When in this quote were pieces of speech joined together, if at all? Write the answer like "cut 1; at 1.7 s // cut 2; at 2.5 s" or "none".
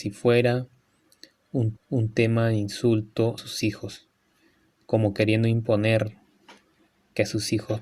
cut 1; at 1.8 s // cut 2; at 3.4 s